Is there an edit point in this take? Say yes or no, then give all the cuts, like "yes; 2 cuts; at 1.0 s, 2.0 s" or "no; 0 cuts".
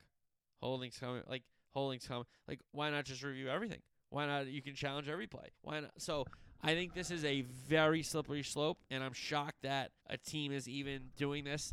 yes; 4 cuts; at 2.6 s, 5.5 s, 8.9 s, 10.0 s